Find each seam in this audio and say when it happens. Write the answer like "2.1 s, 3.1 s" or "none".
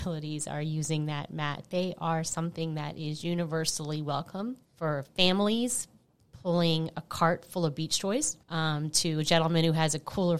4.6 s, 8.4 s